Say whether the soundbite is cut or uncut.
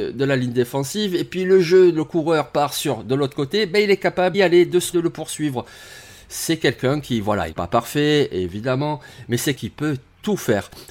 cut